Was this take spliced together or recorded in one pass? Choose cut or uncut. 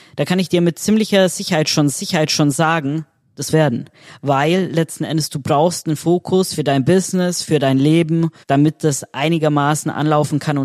cut